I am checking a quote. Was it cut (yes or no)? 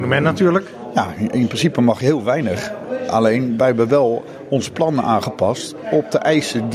no